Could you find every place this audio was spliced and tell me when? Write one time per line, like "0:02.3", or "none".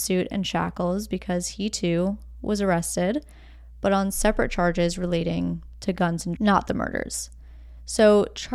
0:06.4